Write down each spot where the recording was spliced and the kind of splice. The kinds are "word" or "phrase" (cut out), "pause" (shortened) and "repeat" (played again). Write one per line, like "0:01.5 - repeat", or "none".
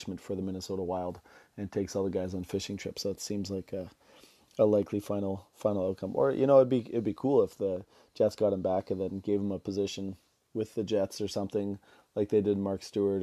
none